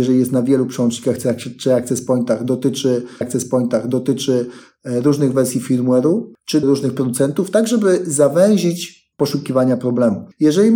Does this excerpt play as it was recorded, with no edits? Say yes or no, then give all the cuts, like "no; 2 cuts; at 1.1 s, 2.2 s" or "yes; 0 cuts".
no; 3 cuts; at 3.2 s, 6.6 s, 9.1 s